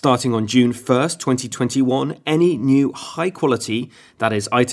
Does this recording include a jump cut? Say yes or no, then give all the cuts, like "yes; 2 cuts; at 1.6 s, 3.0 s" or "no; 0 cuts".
no; 0 cuts